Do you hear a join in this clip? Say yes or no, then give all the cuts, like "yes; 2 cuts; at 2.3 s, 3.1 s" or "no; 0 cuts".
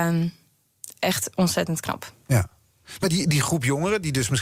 no; 0 cuts